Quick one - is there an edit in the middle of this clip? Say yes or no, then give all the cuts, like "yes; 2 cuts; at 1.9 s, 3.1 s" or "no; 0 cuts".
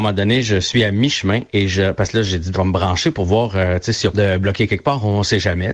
yes; 2 cuts; at 2.5 s, 4.1 s